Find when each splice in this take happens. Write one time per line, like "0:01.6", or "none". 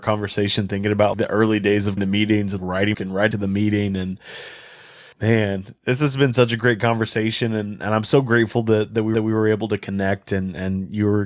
0:01.1
0:02.0
0:02.6
0:02.9
0:03.3
0:05.1
0:09.1